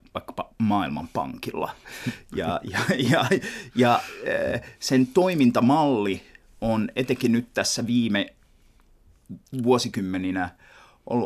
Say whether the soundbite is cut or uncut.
uncut